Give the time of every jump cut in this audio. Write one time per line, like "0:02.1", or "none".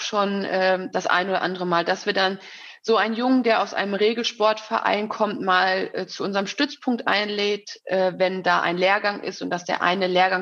none